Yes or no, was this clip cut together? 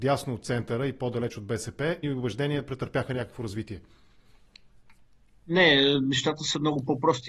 yes